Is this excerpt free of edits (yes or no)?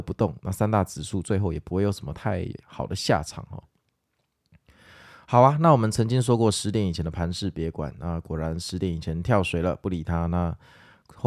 yes